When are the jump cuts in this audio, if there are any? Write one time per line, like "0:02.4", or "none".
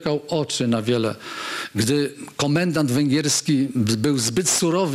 none

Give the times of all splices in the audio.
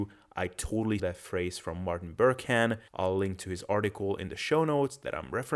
0:01.0
0:02.9

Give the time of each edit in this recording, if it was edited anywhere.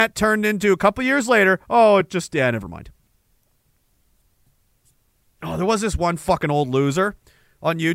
none

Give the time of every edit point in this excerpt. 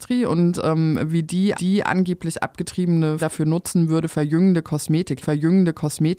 0:01.5
0:03.2
0:05.2

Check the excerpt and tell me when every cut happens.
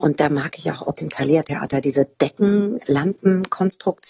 0:00.9
0:02.1

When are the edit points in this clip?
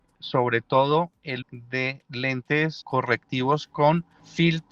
0:01.4
0:02.8

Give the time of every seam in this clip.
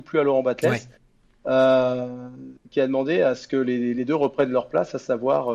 none

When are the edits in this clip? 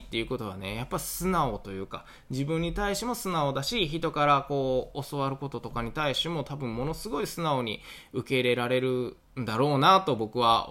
none

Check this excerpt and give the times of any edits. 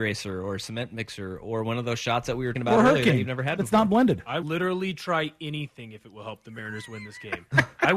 0:02.5
0:04.4

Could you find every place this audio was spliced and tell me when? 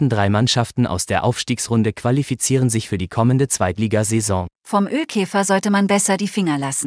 0:04.5

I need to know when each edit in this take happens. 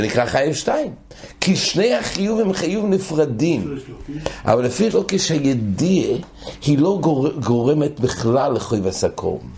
0:04.9

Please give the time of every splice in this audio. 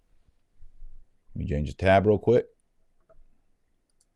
0:01.0

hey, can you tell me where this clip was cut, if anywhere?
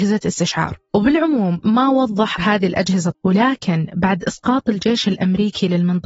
0:01.6
0:02.4
0:03.1

